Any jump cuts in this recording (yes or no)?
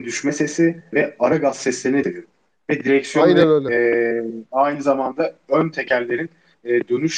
yes